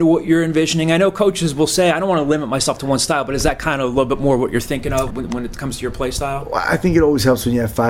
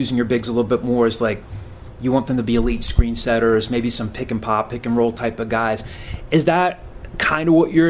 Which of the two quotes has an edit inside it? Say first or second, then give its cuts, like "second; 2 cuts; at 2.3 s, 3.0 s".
first; 1 cut; at 5.1 s